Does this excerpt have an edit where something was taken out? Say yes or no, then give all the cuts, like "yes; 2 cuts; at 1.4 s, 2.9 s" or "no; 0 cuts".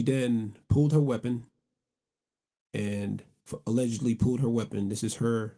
no; 0 cuts